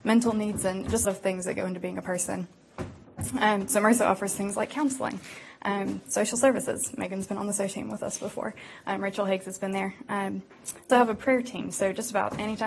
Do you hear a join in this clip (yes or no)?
yes